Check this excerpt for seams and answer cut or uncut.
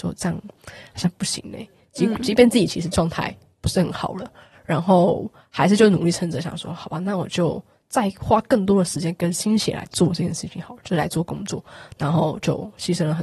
uncut